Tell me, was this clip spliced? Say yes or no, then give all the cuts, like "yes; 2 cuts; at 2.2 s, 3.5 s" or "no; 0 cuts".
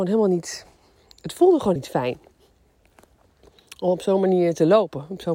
yes; 1 cut; at 1.8 s